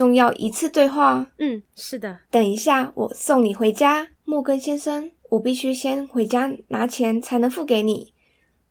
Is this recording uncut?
no; 4 cuts; at 1.7 s, 2.3 s, 4.2 s, 5.2 s

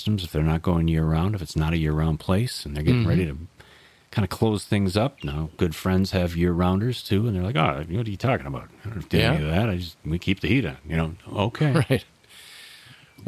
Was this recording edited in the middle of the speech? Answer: no; 0 cuts

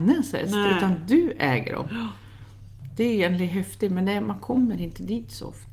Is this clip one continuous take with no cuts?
yes; 0 cuts

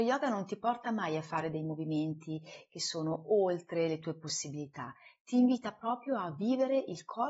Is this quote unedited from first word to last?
yes; 0 cuts

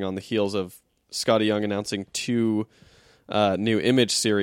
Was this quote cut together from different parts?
no; 0 cuts

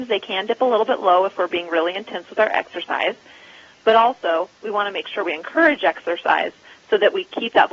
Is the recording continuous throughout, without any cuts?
yes; 0 cuts

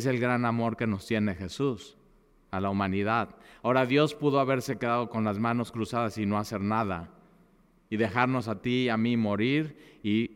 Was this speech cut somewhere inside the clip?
no; 0 cuts

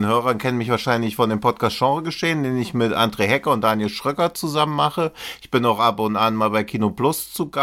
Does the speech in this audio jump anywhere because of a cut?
no; 0 cuts

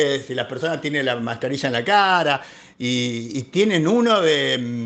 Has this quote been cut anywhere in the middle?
no; 0 cuts

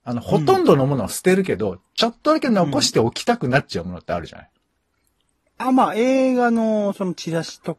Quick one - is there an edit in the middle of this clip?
no; 0 cuts

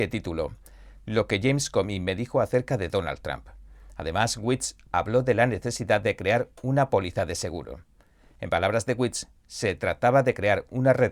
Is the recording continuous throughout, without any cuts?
yes; 0 cuts

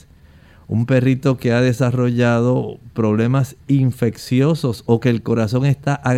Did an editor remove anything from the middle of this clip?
no; 0 cuts

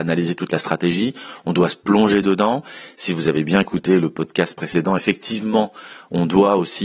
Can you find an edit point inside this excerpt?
no; 0 cuts

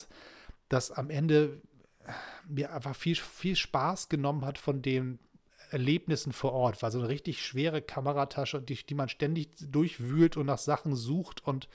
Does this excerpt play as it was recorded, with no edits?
yes; 0 cuts

